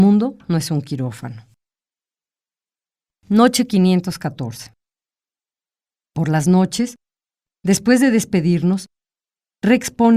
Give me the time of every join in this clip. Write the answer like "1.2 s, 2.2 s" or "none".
none